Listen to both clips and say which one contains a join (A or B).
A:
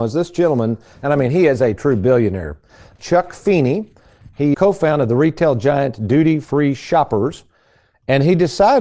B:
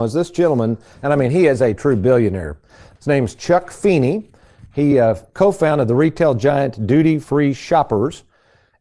A